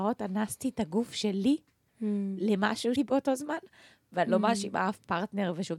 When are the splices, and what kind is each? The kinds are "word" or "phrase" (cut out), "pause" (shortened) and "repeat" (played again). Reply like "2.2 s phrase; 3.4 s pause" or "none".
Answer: 3.0 s phrase

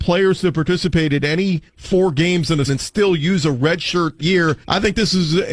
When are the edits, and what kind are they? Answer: 1.7 s pause; 2.7 s word; 4.2 s word; 4.6 s pause

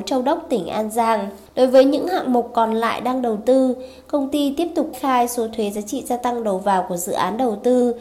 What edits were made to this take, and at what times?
1.5 s pause; 4.9 s word

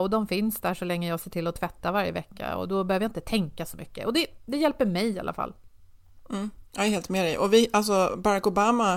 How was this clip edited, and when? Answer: none

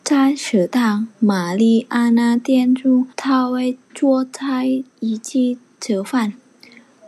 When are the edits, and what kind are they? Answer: 1.1 s pause; 3.1 s pause; 4.9 s pause

